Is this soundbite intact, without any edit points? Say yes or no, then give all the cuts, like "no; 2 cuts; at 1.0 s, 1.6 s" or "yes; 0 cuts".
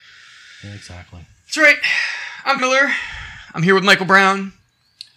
no; 1 cut; at 2.6 s